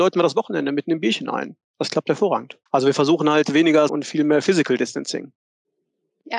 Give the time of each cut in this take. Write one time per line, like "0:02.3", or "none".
0:02.7
0:03.9